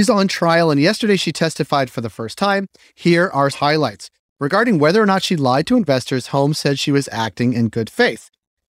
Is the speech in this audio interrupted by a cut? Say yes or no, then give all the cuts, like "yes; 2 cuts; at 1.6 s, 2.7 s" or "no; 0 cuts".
yes; 1 cut; at 3.5 s